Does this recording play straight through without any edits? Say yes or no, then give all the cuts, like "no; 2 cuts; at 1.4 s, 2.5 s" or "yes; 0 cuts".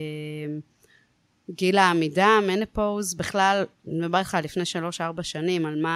yes; 0 cuts